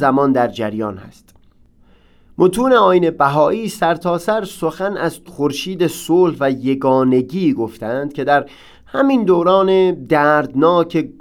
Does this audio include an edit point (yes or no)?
yes